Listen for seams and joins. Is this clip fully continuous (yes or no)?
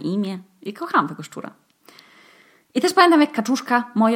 yes